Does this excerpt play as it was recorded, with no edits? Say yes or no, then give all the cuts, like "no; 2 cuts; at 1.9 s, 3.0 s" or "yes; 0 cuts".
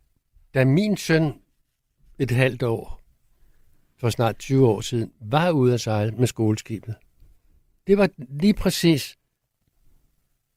yes; 0 cuts